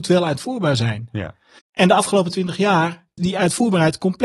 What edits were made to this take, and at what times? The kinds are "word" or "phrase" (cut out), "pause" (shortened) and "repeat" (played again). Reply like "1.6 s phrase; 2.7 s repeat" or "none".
1.6 s pause; 3.2 s word